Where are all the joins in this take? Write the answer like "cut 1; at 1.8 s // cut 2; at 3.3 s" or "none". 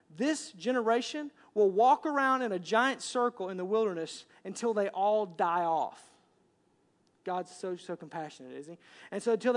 none